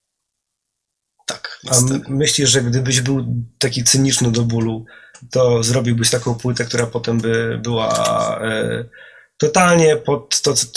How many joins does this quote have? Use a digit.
0